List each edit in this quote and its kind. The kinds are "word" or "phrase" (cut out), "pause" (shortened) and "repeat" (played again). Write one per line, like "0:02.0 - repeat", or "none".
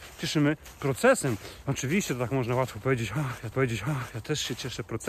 0:03.5 - repeat